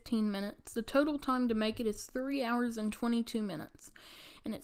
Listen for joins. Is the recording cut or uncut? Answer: uncut